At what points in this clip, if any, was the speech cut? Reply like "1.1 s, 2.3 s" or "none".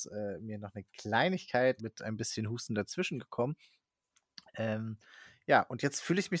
1.8 s